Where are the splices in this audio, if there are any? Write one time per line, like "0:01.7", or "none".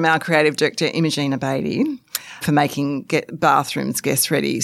0:02.4
0:03.3